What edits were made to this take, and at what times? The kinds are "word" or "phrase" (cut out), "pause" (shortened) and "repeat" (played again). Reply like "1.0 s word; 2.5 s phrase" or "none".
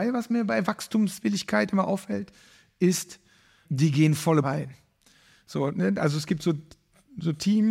3.6 s word; 4.4 s word